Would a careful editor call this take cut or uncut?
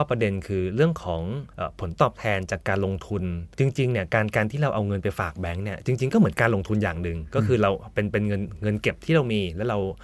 cut